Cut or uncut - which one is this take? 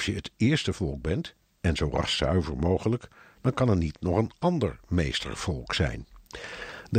uncut